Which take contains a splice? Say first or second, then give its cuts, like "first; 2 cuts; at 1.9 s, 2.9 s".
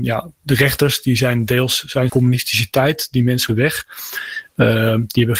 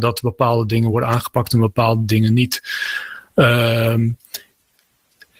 first; 2 cuts; at 2.1 s, 3.5 s